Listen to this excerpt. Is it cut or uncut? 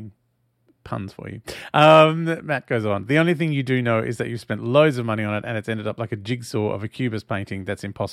uncut